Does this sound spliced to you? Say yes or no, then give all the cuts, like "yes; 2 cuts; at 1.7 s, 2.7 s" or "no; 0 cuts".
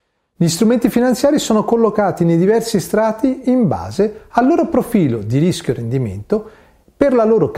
no; 0 cuts